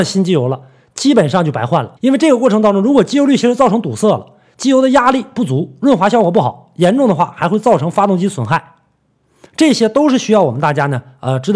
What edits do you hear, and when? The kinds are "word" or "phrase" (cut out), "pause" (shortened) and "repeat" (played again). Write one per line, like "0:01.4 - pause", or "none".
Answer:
0:02.0 - pause